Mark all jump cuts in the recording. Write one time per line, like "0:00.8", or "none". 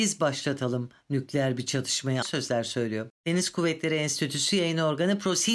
0:02.2
0:03.2